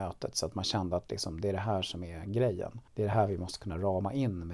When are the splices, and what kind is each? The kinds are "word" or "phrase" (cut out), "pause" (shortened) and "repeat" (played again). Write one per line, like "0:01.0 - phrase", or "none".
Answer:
0:02.9 - pause